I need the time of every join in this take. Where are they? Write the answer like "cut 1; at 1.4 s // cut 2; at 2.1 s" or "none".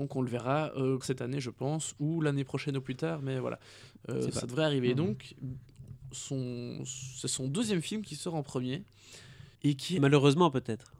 cut 1; at 1.0 s // cut 2; at 9.5 s